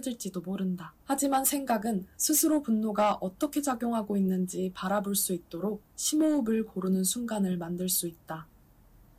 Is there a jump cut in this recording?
yes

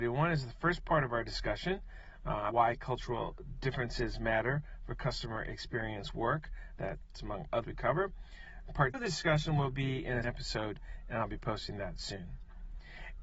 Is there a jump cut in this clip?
yes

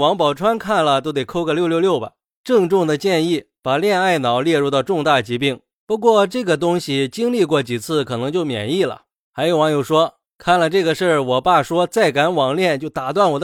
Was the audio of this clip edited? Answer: no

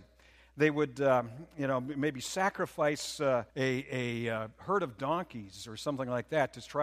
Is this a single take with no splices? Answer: no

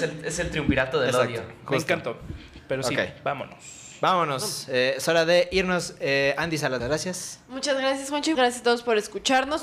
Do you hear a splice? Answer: yes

